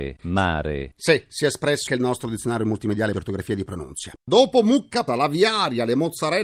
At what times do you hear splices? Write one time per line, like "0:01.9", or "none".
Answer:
0:01.9
0:03.1
0:05.1